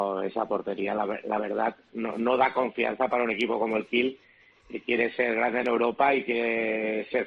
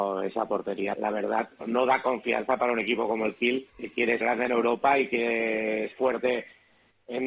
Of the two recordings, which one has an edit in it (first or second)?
second